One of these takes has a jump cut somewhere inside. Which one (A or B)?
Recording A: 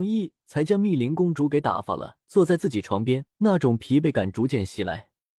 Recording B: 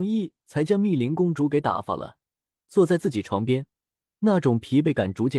A